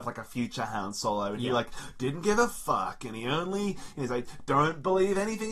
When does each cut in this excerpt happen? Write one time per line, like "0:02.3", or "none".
none